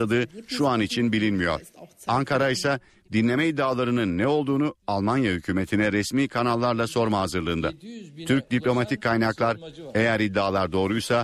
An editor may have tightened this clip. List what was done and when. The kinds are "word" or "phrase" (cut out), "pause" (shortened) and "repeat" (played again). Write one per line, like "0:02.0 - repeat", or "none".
none

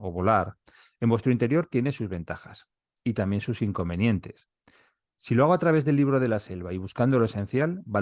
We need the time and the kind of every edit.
none

